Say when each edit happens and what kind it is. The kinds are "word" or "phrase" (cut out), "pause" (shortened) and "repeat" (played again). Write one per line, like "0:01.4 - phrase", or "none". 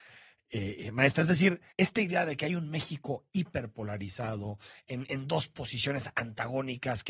0:01.7 - pause